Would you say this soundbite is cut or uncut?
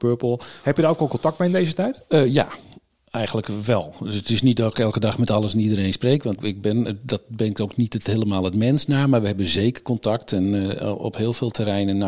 cut